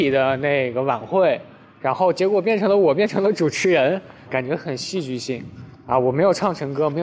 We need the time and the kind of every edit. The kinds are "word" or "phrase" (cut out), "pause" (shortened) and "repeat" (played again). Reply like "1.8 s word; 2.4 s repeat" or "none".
4.3 s word